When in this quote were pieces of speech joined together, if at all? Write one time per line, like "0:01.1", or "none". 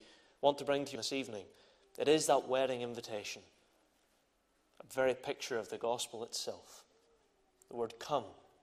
0:01.0